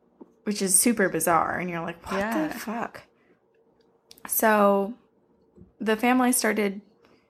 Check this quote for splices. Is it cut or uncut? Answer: uncut